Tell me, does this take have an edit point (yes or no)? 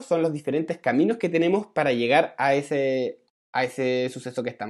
no